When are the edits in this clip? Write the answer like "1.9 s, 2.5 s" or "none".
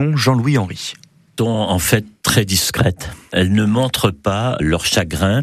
1.4 s